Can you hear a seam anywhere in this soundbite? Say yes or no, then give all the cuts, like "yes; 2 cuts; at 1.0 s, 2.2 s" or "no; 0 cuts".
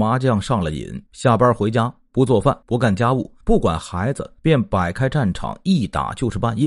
yes; 4 cuts; at 1.1 s, 2.6 s, 3.4 s, 4.4 s